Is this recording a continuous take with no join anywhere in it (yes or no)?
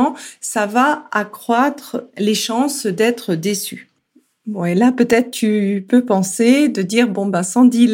yes